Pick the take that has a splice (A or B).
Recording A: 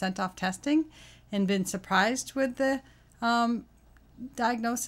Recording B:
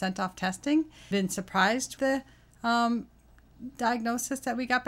B